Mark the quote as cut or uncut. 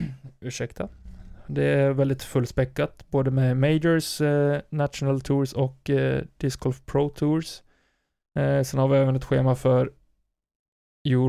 uncut